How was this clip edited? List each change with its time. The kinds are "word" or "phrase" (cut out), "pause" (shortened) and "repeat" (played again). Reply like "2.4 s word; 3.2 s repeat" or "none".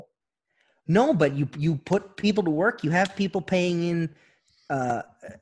none